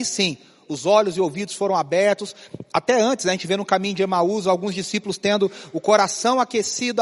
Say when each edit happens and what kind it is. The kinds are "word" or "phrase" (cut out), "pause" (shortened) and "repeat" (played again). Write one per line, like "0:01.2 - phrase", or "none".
none